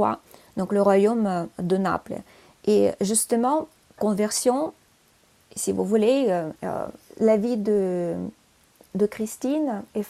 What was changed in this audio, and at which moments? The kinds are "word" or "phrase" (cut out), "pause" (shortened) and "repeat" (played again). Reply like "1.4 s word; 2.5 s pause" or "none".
4.0 s word; 6.6 s pause